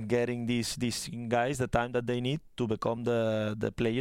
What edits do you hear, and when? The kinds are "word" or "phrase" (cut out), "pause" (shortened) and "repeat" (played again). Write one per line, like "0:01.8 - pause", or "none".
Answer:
none